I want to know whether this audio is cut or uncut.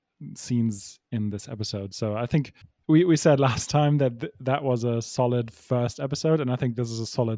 cut